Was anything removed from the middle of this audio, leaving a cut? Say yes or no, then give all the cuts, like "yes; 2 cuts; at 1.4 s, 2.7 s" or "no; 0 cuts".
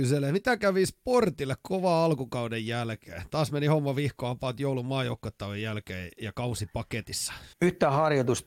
yes; 1 cut; at 7.5 s